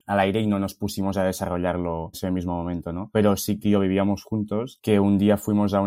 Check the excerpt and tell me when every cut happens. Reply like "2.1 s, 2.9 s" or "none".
2.1 s, 3.6 s